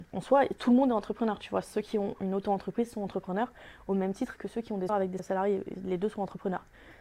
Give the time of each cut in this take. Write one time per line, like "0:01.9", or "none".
0:04.9
0:05.2